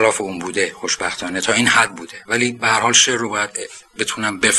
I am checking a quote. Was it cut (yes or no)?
no